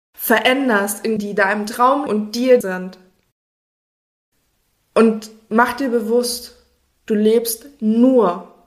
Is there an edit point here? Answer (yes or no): yes